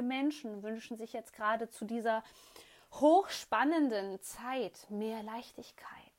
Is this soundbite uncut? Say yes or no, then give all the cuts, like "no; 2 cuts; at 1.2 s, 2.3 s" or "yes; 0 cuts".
yes; 0 cuts